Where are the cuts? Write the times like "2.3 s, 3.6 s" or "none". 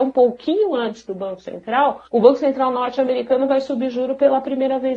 2.1 s